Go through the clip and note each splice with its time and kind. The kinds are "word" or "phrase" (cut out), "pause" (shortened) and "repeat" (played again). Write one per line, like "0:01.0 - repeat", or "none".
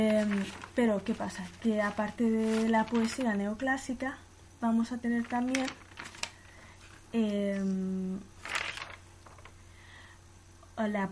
none